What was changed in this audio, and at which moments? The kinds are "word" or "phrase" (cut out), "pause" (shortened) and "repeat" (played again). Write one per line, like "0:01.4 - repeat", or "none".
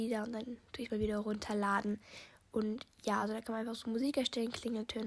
none